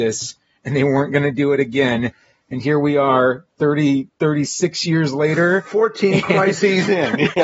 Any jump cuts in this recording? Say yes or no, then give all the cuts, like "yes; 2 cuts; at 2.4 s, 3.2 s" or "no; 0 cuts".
no; 0 cuts